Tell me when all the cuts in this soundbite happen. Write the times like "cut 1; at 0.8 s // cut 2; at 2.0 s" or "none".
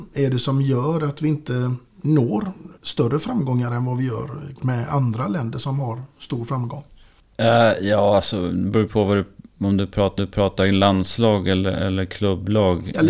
cut 1; at 2.8 s // cut 2; at 4.6 s // cut 3; at 10.2 s